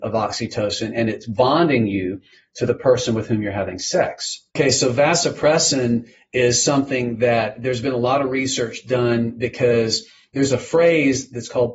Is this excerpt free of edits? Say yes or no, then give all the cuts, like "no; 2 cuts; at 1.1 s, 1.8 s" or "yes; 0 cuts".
no; 1 cut; at 4.5 s